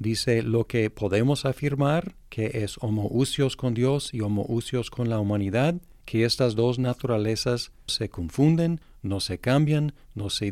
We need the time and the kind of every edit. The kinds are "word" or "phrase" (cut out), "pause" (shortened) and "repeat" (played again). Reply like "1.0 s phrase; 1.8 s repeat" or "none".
7.9 s word